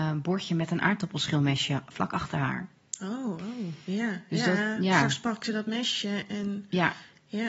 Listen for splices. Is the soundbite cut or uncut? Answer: uncut